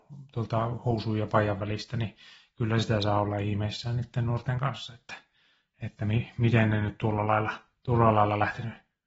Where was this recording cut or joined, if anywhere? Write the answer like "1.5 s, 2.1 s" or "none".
none

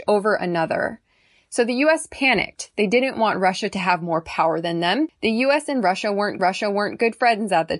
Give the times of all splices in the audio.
6.4 s

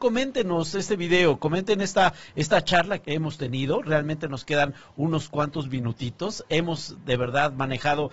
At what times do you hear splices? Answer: 3.0 s

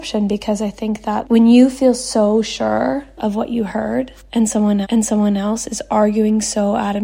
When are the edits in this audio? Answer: 1.2 s, 4.8 s

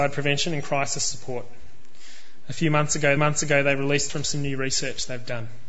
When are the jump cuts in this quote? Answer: 3.2 s, 4.1 s

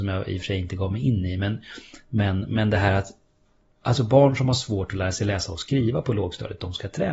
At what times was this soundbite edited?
none

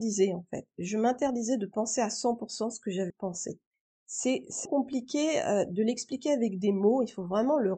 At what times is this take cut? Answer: 3.1 s, 4.6 s

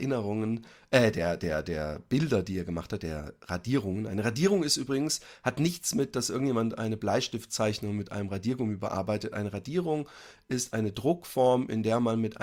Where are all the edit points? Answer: none

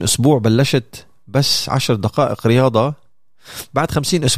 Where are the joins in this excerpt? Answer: none

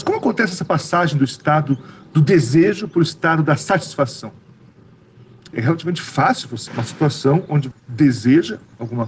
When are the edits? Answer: 5.5 s, 6.7 s, 7.7 s

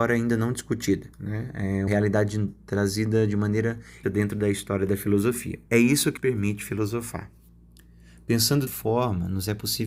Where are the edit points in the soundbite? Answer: 1.1 s, 1.9 s, 4.0 s, 5.7 s, 6.2 s, 8.7 s

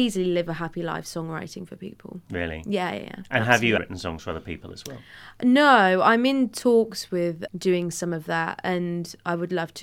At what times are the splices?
3.8 s, 7.5 s

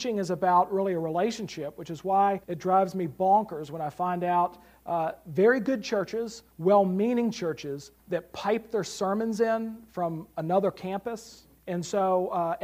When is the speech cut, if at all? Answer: 2.4 s, 6.5 s, 8.0 s, 11.6 s

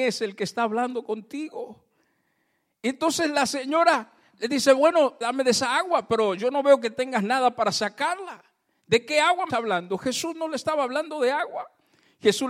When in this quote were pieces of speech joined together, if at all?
5.2 s, 9.5 s

